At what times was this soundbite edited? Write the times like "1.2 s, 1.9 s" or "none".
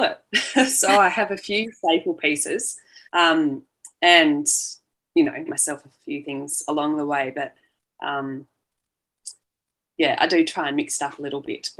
3.1 s, 5.5 s